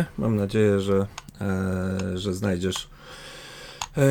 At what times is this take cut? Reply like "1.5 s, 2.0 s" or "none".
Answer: none